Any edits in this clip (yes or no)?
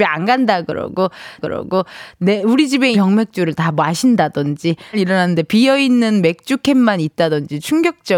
yes